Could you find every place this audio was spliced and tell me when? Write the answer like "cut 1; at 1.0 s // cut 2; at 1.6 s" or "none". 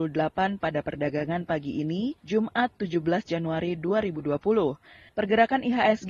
cut 1; at 2.2 s // cut 2; at 5.1 s